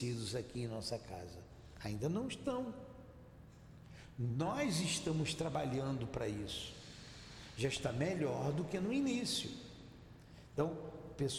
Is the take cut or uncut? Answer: uncut